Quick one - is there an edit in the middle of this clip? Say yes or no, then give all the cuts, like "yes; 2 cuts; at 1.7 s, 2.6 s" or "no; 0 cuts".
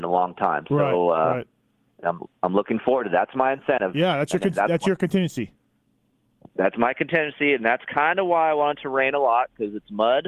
no; 0 cuts